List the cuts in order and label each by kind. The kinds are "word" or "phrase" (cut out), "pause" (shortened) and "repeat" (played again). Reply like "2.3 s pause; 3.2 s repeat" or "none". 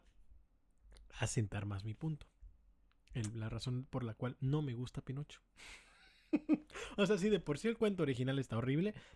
none